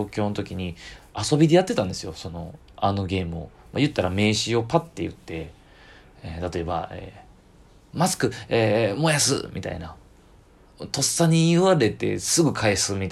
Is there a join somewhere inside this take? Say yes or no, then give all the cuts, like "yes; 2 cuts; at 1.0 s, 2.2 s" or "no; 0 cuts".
no; 0 cuts